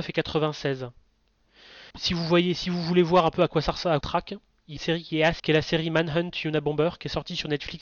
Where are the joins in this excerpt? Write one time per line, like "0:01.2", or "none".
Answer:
0:01.9
0:04.0
0:04.8
0:05.4